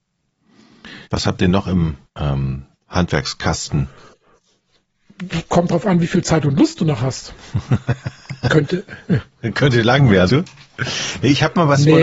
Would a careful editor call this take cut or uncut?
cut